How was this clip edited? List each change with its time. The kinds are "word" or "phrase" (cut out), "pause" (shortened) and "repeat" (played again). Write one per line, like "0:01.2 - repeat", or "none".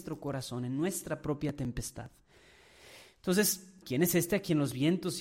0:03.8 - word